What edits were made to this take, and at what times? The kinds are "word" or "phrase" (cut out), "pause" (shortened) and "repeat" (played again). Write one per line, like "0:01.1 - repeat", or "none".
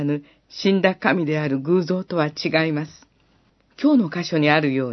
0:03.5 - pause

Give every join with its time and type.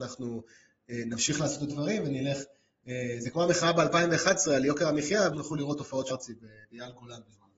0:01.7 - word
0:05.3 - word
0:06.1 - word
0:06.6 - pause

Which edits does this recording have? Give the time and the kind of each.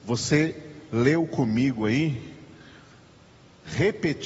none

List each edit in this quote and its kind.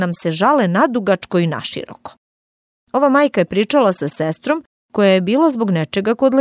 none

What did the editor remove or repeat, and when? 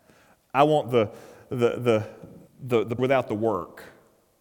0:02.5 - pause
0:03.0 - word

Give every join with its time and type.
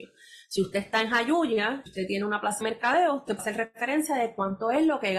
0:01.9 - word
0:02.6 - word
0:03.4 - word

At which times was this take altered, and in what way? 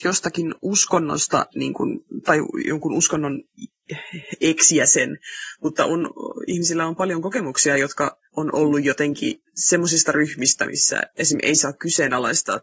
0:08.3 - pause
0:09.5 - pause

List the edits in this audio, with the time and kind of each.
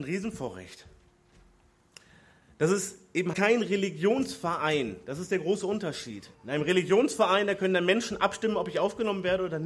0:03.3 - word
0:06.3 - pause

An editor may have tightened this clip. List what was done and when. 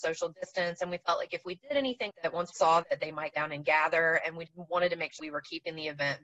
0:02.1 - word
0:02.5 - word
0:02.8 - word
0:03.3 - word
0:04.5 - word
0:05.2 - word

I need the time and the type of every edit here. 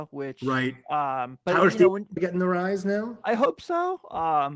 0:02.2 - word

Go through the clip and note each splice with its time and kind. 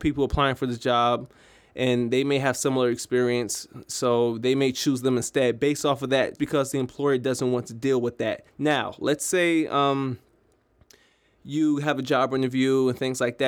0:06.4 - word
0:08.5 - pause

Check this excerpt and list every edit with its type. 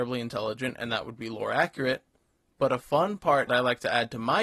0:03.5 - word

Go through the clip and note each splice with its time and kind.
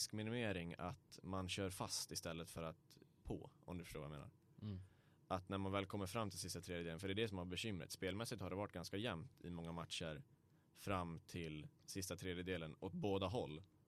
0:03.2 - word

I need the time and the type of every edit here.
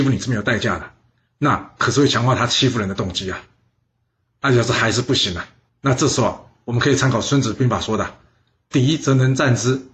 0:05.7 - pause

